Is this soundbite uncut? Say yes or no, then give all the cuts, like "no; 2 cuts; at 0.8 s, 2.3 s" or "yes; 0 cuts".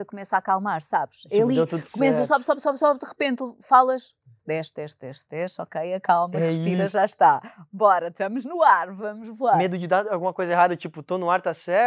yes; 0 cuts